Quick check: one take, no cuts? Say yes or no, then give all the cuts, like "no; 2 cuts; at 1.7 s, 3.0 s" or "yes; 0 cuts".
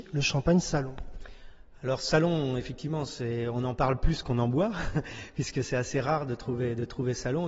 yes; 0 cuts